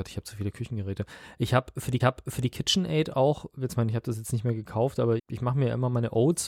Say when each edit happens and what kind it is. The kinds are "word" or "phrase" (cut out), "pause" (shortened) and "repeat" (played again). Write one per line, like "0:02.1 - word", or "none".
0:02.0 - repeat
0:03.7 - phrase
0:05.2 - word